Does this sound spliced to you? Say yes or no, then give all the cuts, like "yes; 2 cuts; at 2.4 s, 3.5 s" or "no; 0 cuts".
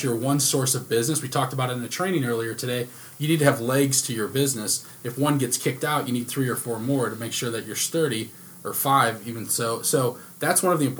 no; 0 cuts